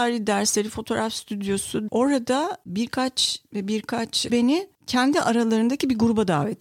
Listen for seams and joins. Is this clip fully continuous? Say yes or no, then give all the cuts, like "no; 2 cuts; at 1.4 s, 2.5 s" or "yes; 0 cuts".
no; 3 cuts; at 1.9 s, 3.5 s, 4.3 s